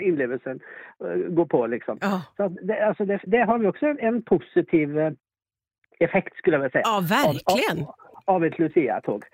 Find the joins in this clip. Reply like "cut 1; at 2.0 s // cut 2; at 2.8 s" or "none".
cut 1; at 3.3 s